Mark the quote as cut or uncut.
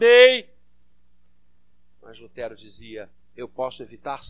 uncut